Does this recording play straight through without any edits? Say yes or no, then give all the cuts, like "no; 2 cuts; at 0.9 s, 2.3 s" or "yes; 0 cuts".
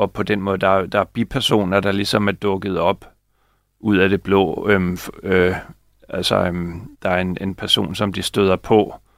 no; 1 cut; at 6.9 s